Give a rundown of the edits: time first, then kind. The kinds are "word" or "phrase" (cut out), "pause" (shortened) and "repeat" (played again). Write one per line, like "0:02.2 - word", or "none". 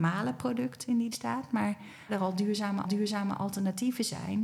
0:01.1 - word
0:02.1 - word
0:02.8 - repeat